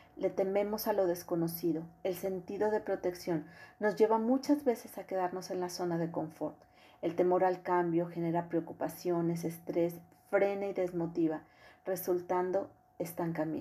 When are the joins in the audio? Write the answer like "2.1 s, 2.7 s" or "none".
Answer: none